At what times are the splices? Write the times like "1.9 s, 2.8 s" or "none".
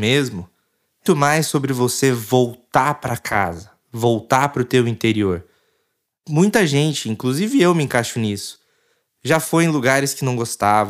1.1 s